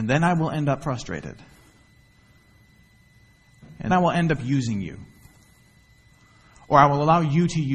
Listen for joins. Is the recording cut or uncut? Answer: cut